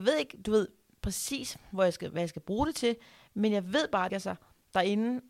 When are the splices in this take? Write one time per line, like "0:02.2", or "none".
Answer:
0:04.1